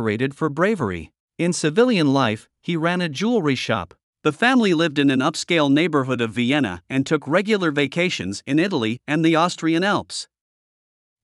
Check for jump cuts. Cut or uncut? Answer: cut